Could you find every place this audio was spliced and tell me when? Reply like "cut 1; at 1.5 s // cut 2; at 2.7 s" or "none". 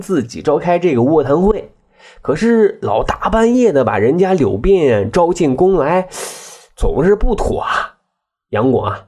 none